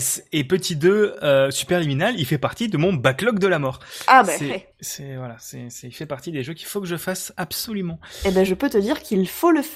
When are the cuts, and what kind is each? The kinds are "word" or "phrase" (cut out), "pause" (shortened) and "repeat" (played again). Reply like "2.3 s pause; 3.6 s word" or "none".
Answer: 4.7 s pause